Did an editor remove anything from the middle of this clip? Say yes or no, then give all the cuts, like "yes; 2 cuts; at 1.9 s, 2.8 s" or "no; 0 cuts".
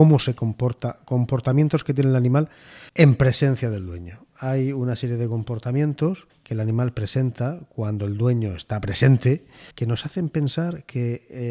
yes; 3 cuts; at 2.9 s, 6.3 s, 9.7 s